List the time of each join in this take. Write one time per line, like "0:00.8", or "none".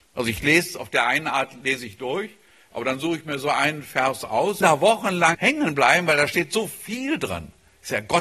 0:04.6
0:05.3